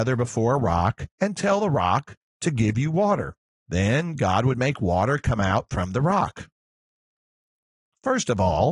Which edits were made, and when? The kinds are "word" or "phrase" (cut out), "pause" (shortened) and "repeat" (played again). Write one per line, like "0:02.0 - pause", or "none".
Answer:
0:01.1 - pause
0:03.4 - pause